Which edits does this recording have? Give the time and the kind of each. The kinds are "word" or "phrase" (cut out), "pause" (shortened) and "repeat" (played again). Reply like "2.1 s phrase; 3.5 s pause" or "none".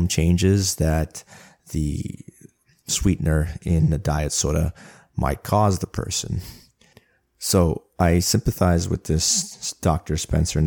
none